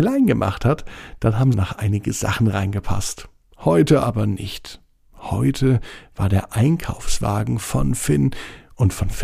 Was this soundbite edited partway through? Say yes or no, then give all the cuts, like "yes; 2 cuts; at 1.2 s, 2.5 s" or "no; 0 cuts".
yes; 1 cut; at 1.5 s